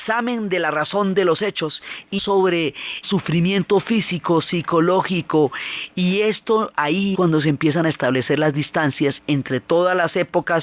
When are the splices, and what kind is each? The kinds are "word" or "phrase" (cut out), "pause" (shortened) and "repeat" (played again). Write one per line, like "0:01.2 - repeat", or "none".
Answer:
0:02.2 - word
0:03.0 - word
0:07.1 - word